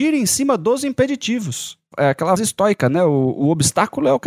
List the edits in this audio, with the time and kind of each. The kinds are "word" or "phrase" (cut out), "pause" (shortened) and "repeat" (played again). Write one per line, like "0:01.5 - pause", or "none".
0:02.4 - word